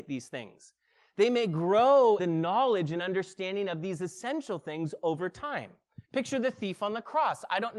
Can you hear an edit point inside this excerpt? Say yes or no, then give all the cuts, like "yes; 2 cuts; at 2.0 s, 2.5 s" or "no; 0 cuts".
yes; 2 cuts; at 2.2 s, 6.0 s